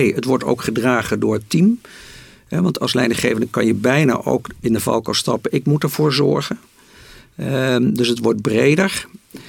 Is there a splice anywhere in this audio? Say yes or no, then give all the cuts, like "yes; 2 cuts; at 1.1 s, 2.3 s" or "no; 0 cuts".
no; 0 cuts